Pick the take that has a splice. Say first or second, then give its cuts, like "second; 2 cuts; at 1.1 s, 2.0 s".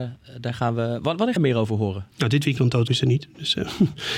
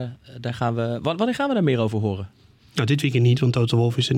first; 4 cuts; at 1.4 s, 2.1 s, 2.6 s, 2.9 s